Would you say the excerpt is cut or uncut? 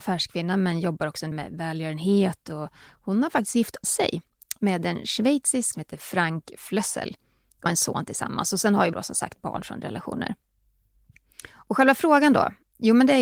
cut